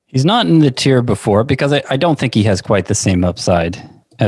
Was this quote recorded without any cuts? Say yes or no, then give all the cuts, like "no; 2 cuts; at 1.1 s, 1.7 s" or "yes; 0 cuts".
yes; 0 cuts